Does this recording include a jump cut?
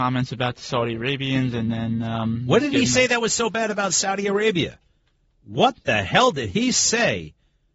no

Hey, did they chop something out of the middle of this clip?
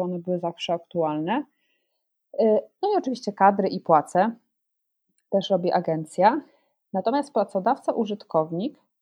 no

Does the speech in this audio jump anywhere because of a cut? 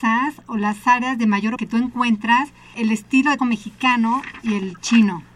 yes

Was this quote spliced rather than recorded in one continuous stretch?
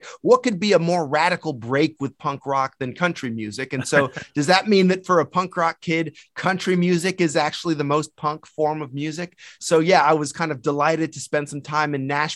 no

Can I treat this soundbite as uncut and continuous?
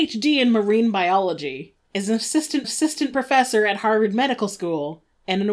no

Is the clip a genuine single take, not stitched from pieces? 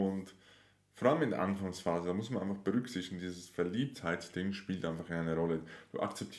yes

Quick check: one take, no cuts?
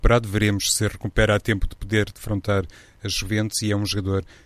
yes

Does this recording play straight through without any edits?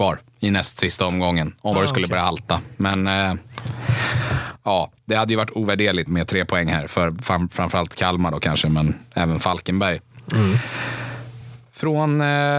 no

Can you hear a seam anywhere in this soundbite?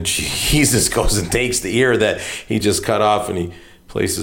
no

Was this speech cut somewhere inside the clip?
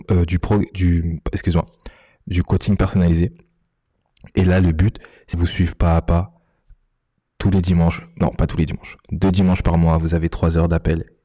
yes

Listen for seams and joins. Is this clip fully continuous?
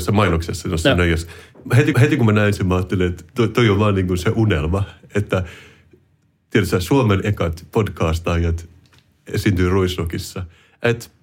no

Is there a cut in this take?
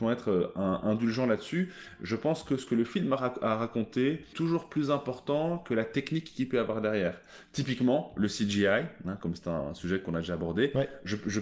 yes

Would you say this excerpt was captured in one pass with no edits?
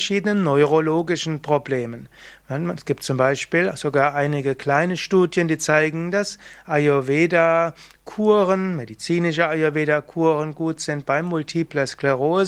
yes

